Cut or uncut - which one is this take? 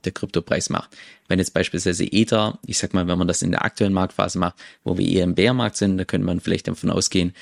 uncut